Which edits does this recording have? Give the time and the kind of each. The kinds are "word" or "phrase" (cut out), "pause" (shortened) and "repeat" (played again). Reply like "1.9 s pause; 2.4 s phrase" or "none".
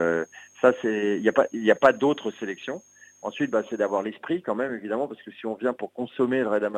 none